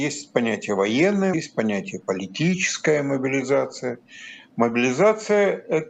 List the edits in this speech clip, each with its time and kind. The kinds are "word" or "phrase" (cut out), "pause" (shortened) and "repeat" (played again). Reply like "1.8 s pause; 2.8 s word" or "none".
1.3 s word

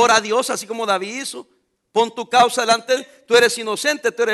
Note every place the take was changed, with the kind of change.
3.0 s word

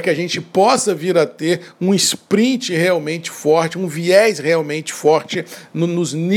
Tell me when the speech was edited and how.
none

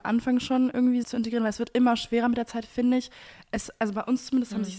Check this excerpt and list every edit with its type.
1.0 s word

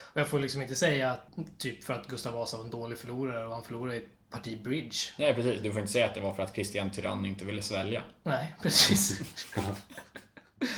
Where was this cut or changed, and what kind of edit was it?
none

